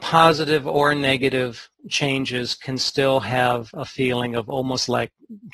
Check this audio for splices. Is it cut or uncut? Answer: uncut